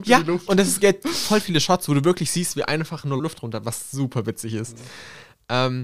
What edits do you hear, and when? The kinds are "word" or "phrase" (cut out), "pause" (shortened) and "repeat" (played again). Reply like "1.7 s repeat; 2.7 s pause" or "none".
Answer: 3.2 s phrase